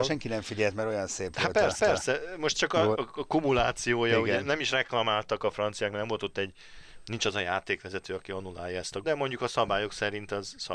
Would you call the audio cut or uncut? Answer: cut